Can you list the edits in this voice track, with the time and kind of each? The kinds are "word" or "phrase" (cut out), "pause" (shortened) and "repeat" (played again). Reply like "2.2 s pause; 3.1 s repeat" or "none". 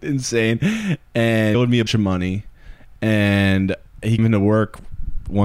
1.5 s word; 1.9 s word; 4.2 s word